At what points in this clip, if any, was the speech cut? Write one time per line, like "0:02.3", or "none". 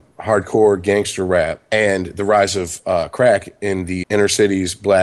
0:04.0

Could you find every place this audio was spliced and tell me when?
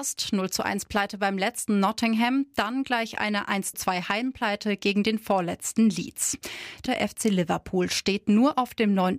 0:03.7
0:06.9

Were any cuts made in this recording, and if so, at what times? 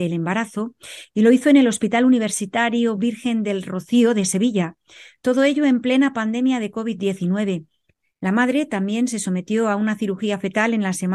none

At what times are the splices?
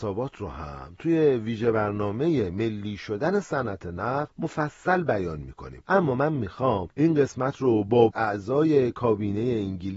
0:08.1

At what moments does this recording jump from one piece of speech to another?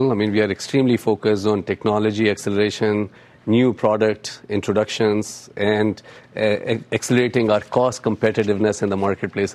none

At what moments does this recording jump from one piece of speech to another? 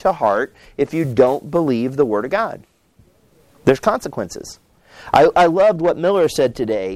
none

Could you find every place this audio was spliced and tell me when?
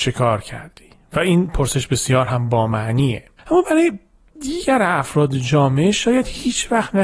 none

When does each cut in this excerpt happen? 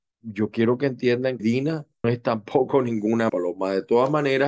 0:01.4
0:02.0
0:03.3

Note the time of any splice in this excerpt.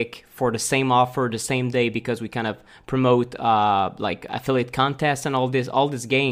none

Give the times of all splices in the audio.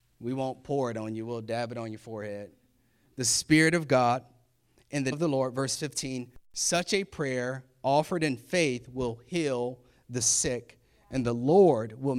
0:05.1

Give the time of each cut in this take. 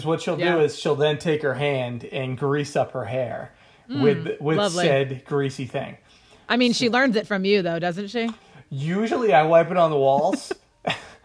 none

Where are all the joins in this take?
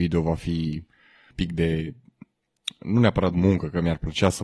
0:01.3

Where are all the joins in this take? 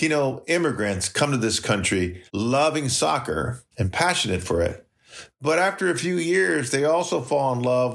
0:02.3
0:03.7

